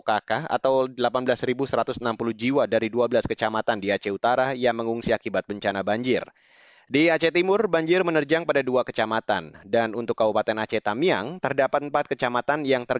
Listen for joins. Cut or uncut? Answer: uncut